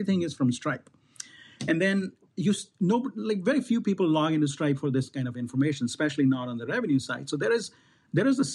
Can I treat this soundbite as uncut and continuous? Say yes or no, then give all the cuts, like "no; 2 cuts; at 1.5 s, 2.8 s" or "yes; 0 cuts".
yes; 0 cuts